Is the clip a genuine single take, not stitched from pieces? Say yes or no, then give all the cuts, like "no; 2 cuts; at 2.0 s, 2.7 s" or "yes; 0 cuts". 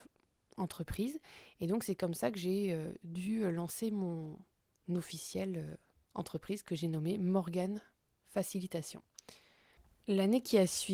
yes; 0 cuts